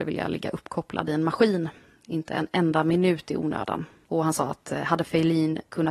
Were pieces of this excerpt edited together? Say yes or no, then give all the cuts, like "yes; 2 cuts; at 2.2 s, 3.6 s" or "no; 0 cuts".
no; 0 cuts